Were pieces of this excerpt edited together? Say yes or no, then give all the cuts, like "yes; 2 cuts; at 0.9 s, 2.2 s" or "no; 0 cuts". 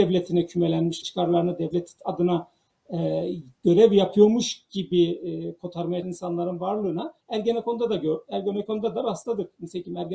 yes; 3 cuts; at 1.0 s, 6.0 s, 7.2 s